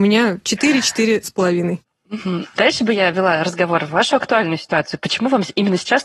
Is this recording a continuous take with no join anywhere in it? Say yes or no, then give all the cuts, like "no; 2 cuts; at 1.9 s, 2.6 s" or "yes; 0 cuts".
yes; 0 cuts